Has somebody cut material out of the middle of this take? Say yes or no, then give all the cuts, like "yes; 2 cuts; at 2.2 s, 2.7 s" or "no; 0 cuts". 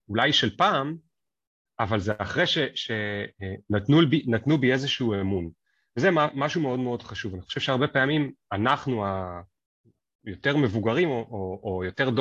no; 0 cuts